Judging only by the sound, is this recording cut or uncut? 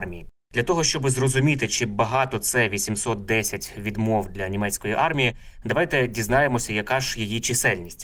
uncut